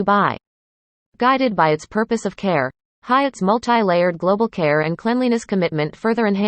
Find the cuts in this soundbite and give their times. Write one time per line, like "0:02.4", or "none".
none